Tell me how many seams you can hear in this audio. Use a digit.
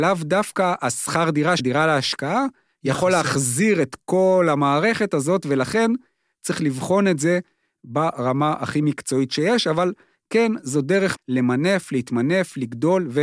2